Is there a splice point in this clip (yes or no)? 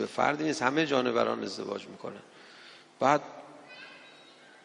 no